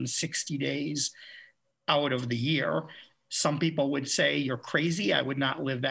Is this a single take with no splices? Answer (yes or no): yes